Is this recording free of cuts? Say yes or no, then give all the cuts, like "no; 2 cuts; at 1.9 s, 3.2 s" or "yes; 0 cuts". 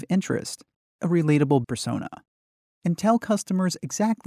no; 2 cuts; at 1.0 s, 1.6 s